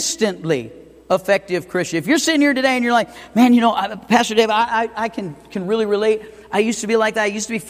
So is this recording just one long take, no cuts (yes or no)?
yes